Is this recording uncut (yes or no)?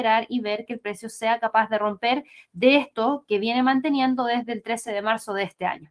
yes